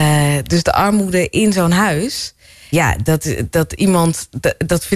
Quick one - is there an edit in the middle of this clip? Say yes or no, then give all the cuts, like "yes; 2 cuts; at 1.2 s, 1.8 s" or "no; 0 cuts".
yes; 1 cut; at 2.7 s